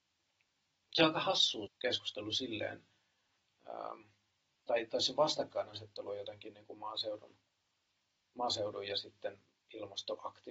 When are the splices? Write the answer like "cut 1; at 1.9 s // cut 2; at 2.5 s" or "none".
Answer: cut 1; at 1.7 s